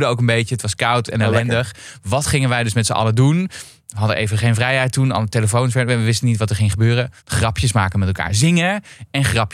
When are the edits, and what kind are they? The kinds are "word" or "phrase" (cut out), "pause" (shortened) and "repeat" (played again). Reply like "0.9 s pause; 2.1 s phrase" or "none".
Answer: 7.2 s pause